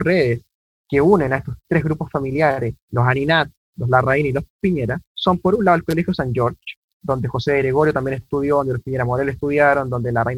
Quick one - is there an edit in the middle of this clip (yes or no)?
yes